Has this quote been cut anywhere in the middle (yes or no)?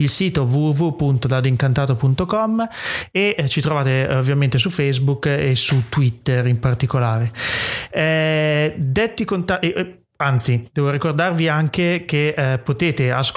no